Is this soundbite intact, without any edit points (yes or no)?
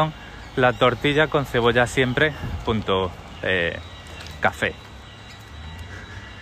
yes